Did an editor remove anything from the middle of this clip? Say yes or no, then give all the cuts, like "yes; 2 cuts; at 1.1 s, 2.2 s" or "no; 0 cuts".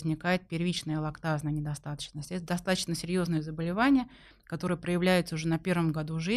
no; 0 cuts